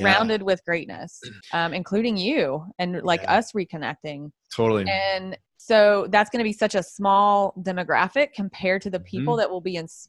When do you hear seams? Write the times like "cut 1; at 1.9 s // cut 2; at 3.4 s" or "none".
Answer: cut 1; at 1.4 s // cut 2; at 5.5 s